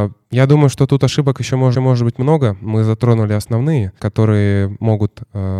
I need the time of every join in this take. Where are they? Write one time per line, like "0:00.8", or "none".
0:01.7
0:04.0